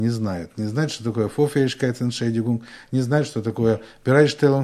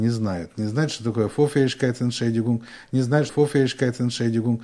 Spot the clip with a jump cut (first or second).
second